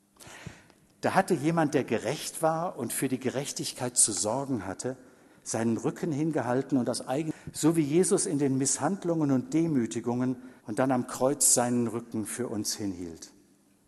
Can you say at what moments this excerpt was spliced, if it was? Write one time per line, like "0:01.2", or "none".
0:10.6

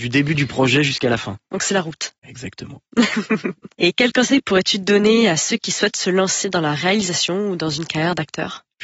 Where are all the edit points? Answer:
0:02.2

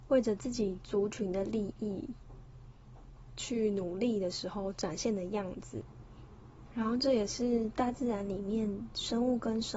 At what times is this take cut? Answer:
none

